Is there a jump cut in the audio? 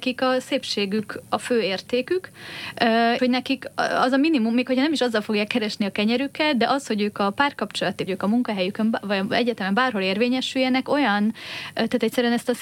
yes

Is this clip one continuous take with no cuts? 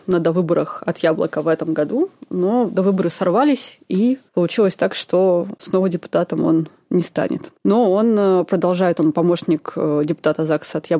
no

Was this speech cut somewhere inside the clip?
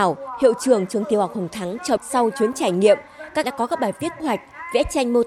yes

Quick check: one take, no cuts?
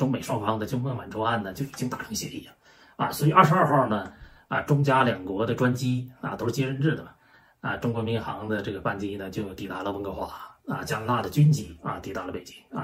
yes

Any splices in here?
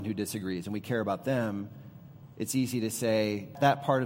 no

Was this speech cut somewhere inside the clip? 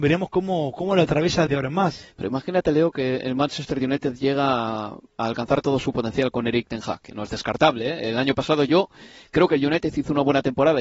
yes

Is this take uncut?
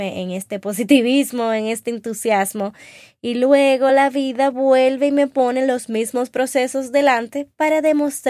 yes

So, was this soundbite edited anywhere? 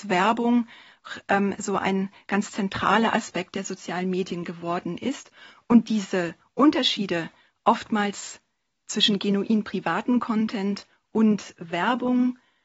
no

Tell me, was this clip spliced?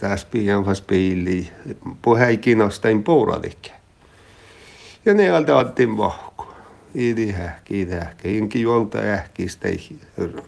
no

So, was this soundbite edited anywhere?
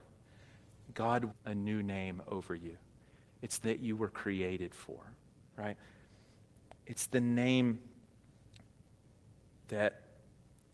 yes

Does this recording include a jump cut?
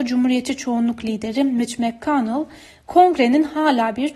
no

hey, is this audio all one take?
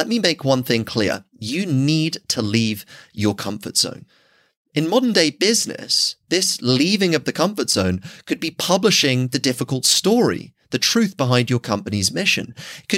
yes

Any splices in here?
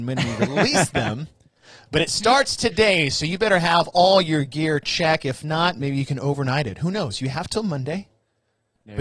no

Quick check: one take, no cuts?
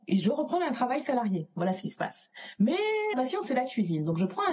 no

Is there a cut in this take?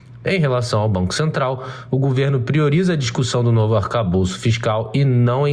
no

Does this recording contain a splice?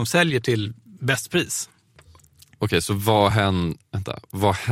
no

